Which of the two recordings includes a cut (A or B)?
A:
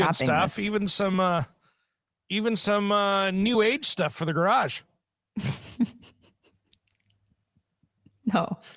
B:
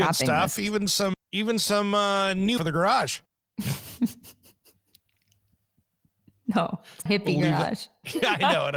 B